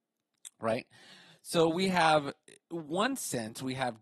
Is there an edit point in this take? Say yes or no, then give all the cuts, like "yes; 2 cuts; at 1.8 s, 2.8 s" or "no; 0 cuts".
no; 0 cuts